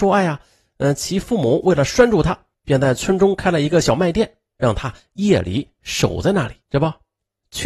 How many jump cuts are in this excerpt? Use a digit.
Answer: 1